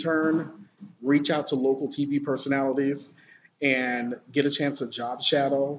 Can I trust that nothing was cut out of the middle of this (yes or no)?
yes